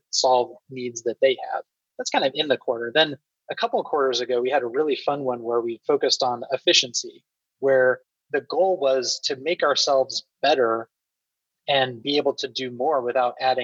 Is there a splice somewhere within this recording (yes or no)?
no